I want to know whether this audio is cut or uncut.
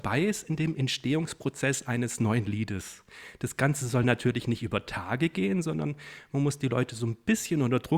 uncut